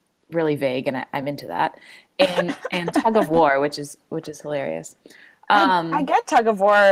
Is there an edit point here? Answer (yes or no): no